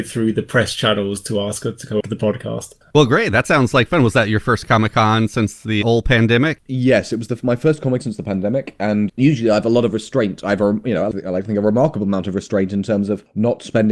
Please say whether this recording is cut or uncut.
cut